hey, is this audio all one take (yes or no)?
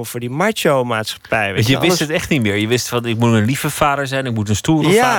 yes